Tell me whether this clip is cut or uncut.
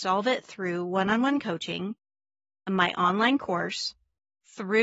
uncut